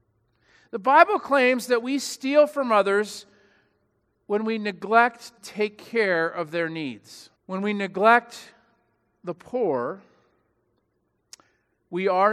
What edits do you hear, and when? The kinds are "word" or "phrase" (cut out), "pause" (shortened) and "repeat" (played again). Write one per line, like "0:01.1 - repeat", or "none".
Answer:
0:05.4 - word
0:07.4 - pause